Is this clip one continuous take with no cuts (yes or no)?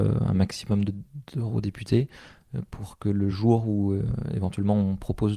yes